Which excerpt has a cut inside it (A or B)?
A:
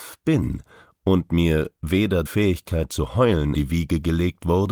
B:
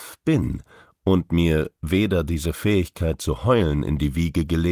A